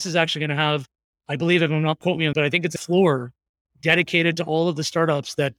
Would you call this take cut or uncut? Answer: cut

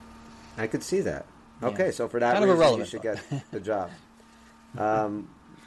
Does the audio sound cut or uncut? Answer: uncut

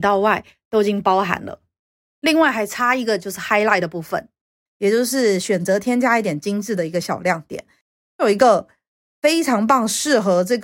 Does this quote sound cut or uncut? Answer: uncut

